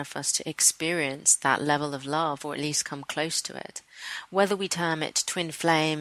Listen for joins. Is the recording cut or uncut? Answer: uncut